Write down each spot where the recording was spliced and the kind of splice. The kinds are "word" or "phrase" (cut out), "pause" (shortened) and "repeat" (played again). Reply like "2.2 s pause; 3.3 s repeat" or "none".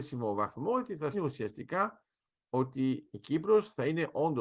1.1 s word